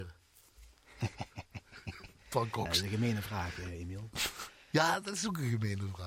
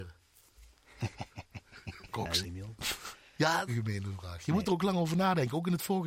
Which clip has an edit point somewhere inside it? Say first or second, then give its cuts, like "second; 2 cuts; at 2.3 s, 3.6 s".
second; 3 cuts; at 2.1 s, 2.4 s, 3.7 s